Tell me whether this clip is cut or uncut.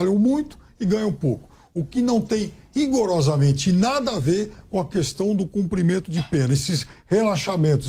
uncut